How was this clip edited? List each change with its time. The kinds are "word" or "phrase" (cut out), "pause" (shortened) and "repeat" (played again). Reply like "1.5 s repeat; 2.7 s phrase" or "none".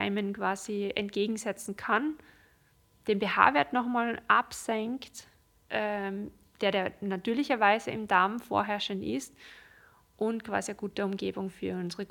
none